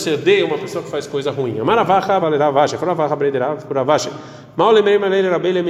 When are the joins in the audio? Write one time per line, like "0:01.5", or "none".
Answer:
0:02.2